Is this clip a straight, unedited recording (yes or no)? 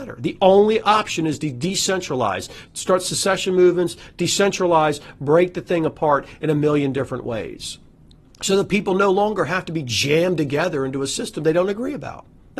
yes